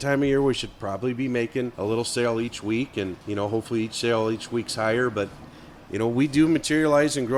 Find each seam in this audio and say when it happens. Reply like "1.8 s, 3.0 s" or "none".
1.7 s, 3.2 s